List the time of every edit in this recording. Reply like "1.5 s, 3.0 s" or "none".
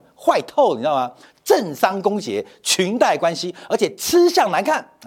none